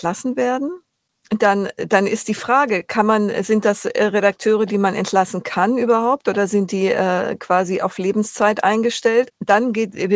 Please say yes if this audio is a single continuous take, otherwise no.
yes